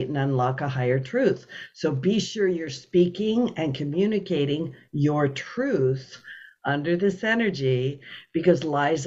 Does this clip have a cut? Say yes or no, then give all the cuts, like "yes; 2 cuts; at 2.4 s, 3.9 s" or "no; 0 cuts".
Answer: no; 0 cuts